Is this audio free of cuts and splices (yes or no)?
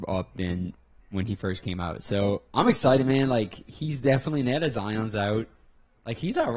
yes